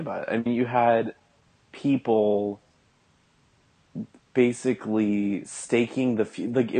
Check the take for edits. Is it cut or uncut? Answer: uncut